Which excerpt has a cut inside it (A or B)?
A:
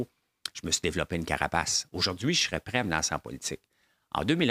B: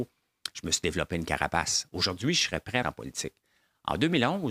B